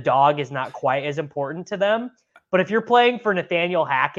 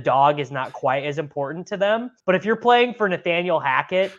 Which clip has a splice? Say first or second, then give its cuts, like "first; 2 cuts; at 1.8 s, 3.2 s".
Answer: second; 1 cut; at 2.2 s